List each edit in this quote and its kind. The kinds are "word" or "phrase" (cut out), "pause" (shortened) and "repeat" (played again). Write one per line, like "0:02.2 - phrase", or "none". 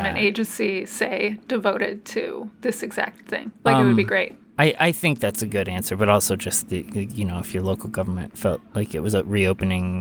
0:03.6 - pause